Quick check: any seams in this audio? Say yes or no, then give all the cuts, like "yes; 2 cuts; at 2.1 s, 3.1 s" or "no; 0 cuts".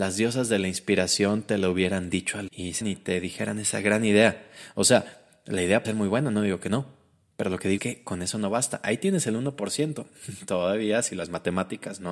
yes; 4 cuts; at 2.5 s, 2.8 s, 5.8 s, 7.8 s